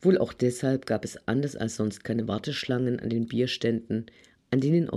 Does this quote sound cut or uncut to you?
uncut